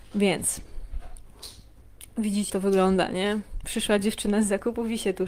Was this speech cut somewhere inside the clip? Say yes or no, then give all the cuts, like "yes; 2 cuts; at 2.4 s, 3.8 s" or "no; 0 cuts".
yes; 1 cut; at 2.5 s